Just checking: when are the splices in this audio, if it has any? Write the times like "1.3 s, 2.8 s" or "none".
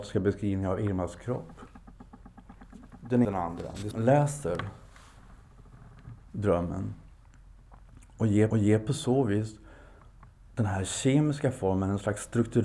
3.2 s, 3.9 s, 6.2 s, 8.5 s